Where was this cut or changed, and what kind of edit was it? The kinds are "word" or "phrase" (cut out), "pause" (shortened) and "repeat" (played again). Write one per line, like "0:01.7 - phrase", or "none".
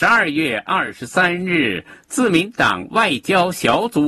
none